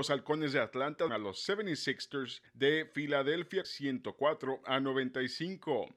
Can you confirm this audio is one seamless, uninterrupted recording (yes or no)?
no